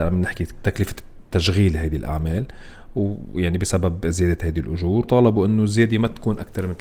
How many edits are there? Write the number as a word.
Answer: one